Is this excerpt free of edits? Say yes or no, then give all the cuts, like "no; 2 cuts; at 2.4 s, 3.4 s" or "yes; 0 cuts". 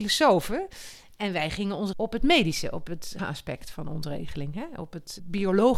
no; 2 cuts; at 1.9 s, 3.2 s